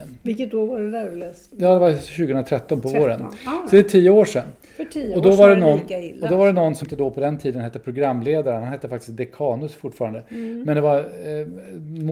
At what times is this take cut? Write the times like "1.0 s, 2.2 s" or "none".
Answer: 6.8 s